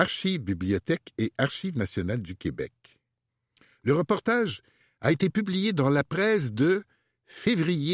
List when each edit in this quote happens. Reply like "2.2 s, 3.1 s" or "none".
none

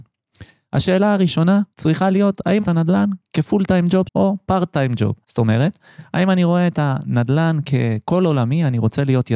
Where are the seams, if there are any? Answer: 1.7 s, 2.6 s, 4.1 s, 5.2 s

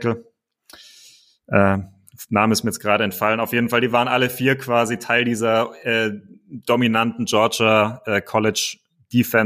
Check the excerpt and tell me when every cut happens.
none

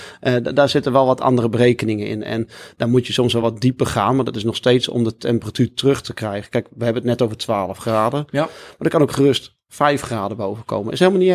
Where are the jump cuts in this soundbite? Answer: none

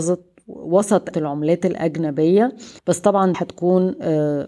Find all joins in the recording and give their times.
1.1 s, 2.8 s, 3.3 s

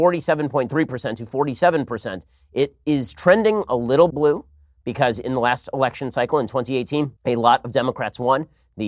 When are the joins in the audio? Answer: 4.1 s, 7.2 s

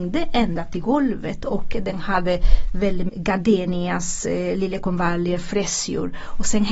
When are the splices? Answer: 3.1 s

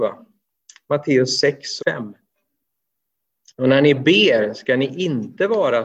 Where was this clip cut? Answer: 1.8 s

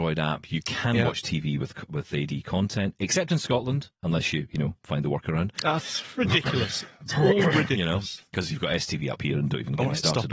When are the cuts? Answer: 3.9 s, 5.5 s, 8.3 s

